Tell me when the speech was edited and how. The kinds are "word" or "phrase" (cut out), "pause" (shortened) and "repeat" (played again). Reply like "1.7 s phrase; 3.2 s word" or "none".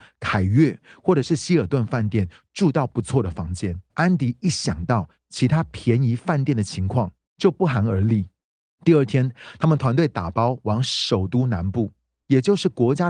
3.9 s pause; 7.2 s pause